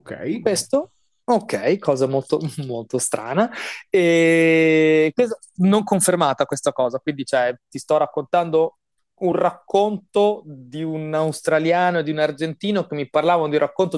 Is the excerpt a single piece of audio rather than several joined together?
yes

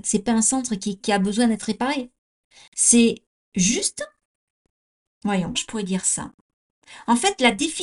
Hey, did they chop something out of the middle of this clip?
yes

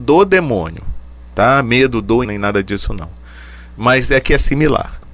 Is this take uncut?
no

